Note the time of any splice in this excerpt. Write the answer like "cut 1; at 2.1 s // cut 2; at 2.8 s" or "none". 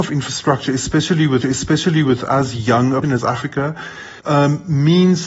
cut 1; at 1.4 s // cut 2; at 3.0 s // cut 3; at 4.2 s